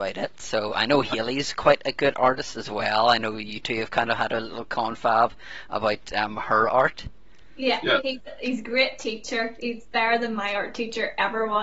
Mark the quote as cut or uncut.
uncut